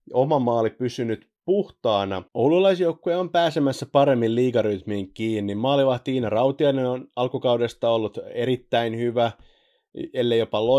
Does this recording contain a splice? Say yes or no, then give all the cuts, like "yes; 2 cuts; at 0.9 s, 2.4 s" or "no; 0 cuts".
yes; 1 cut; at 2.3 s